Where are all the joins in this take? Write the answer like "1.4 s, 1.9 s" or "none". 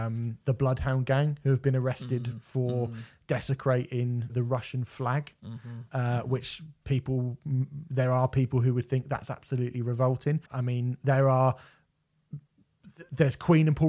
4.3 s, 10.5 s